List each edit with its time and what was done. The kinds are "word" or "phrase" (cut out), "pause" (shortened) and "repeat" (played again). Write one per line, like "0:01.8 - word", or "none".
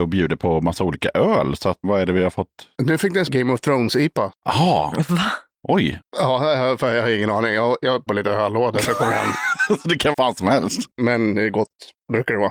0:01.8 - word
0:03.3 - word
0:08.1 - word
0:10.1 - word

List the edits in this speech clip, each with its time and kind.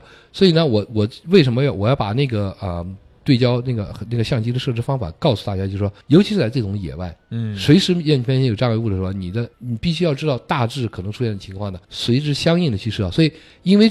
0:06.0 - pause
0:09.5 - pause
0:11.8 - pause

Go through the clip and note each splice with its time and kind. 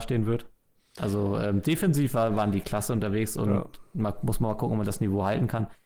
none

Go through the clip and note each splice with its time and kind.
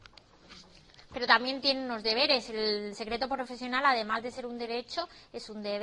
none

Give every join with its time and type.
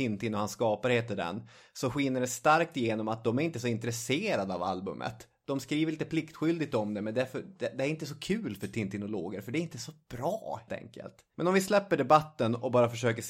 0:10.7 - word

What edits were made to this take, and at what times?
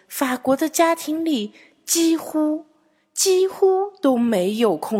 none

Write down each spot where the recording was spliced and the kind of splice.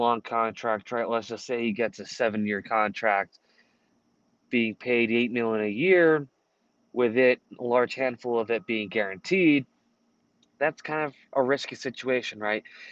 none

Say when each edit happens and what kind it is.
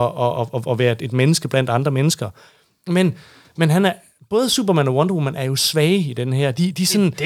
none

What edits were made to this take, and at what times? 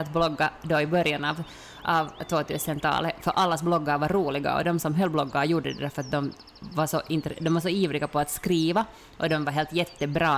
none

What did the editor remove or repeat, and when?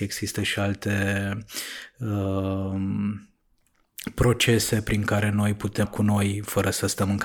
0:05.8 - word

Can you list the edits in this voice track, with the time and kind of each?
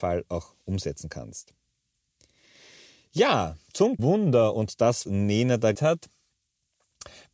0:04.0 - word
0:05.0 - word
0:05.7 - word

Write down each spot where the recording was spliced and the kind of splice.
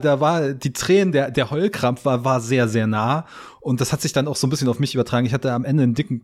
none

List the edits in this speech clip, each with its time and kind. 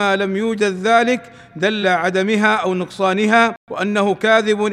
0:01.8 - word
0:03.6 - pause

